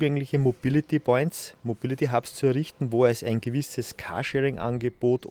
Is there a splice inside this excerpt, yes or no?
no